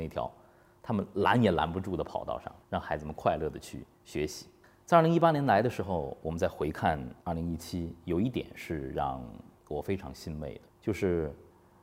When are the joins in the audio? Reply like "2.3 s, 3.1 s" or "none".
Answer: 2.6 s, 3.9 s, 4.6 s, 7.2 s, 9.6 s, 10.7 s